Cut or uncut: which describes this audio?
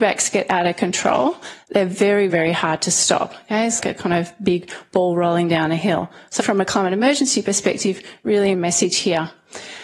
cut